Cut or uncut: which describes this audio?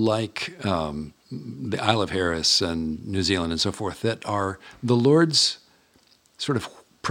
uncut